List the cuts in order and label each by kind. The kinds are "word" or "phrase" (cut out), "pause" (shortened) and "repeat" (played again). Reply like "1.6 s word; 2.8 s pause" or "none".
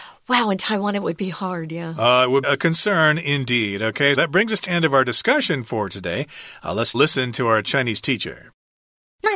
2.4 s word; 4.1 s word; 4.7 s word; 6.9 s word